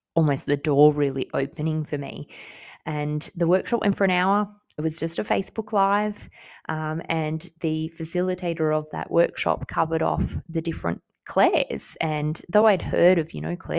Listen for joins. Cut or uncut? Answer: uncut